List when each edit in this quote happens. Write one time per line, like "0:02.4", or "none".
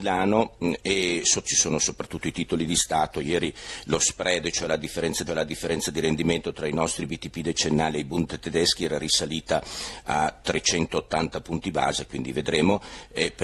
0:01.4
0:05.3